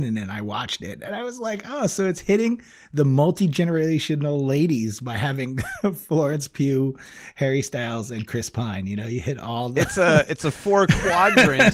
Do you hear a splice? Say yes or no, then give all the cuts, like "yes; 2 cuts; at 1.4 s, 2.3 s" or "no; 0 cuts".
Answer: no; 0 cuts